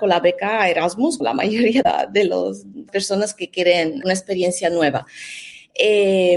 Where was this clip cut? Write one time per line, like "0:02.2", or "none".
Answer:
0:01.2
0:01.8
0:02.9
0:04.0